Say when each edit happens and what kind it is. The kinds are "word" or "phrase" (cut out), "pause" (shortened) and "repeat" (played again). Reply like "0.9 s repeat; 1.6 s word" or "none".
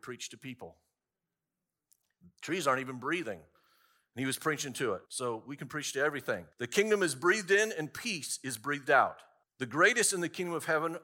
5.1 s pause; 6.5 s pause; 9.4 s pause